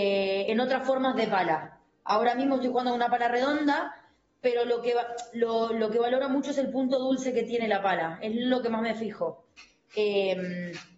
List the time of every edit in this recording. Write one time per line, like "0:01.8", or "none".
none